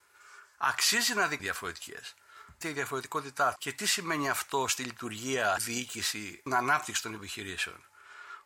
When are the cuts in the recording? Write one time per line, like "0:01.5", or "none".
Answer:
0:01.4
0:02.6
0:03.6
0:05.6
0:06.5